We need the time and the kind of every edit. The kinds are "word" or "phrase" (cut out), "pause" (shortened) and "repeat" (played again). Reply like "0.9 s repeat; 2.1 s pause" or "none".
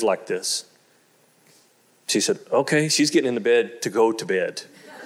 none